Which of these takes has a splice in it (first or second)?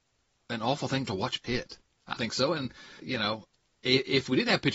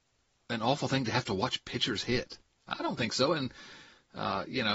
first